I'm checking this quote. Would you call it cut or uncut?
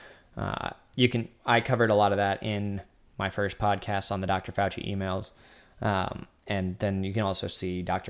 uncut